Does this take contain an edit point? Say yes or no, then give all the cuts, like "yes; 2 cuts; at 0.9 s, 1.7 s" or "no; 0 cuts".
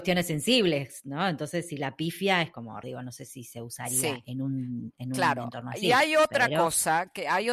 yes; 1 cut; at 2.8 s